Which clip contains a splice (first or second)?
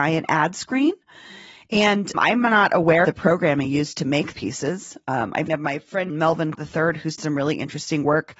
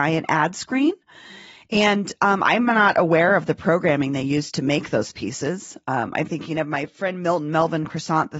first